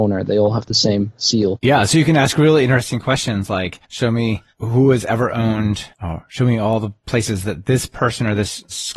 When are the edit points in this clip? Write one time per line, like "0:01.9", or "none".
0:03.8
0:05.9

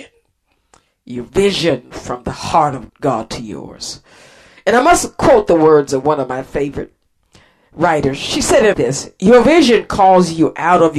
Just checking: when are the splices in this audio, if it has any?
0:02.9
0:08.7

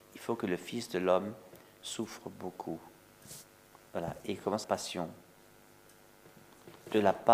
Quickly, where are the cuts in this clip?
0:03.9
0:04.6

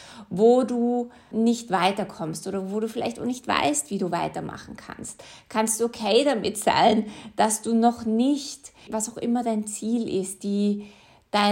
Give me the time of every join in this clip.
0:01.3
0:08.9

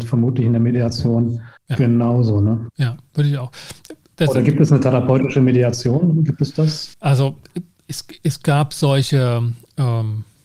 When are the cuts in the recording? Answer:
0:01.6
0:06.9

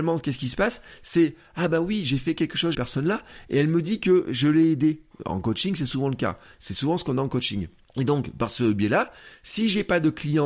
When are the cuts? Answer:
0:02.7
0:07.8

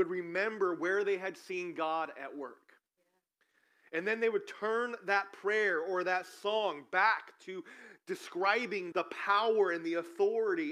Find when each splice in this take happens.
0:08.9

